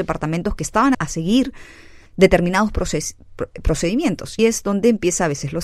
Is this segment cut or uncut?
cut